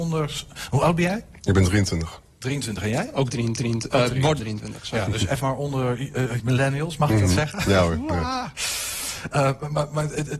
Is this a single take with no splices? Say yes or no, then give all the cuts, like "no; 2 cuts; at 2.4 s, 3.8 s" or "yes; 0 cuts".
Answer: no; 4 cuts; at 3.6 s, 4.4 s, 5.4 s, 6.4 s